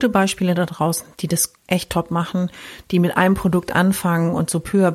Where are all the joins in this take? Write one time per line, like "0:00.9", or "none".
0:01.6